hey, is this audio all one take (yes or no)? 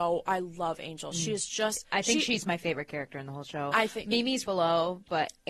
no